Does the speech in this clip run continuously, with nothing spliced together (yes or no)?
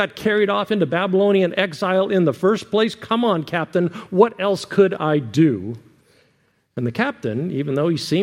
yes